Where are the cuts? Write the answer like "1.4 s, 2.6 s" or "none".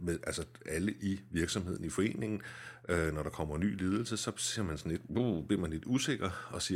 none